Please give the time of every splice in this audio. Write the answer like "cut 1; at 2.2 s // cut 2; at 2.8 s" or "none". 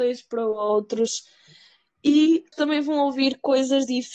cut 1; at 2.5 s